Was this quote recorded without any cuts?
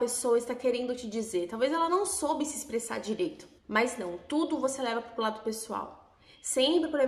no; 1 cut; at 3.6 s

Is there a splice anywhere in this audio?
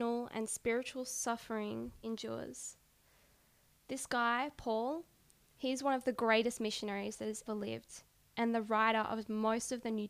yes; 2 cuts; at 2.0 s, 7.5 s

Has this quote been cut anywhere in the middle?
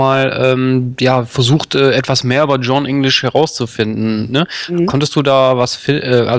no; 0 cuts

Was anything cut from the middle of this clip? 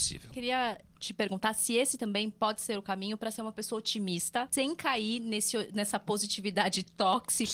no; 0 cuts

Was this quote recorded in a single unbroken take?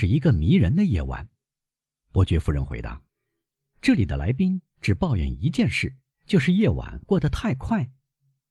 no; 1 cut; at 3.1 s

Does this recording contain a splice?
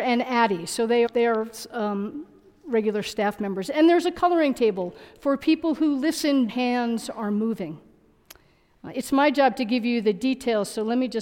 yes; 2 cuts; at 1.1 s, 6.5 s

